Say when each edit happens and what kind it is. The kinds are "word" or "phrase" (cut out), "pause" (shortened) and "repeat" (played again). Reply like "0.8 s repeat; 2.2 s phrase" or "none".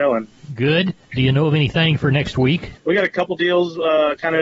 2.8 s pause